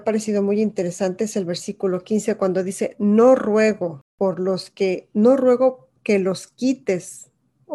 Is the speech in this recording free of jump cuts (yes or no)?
no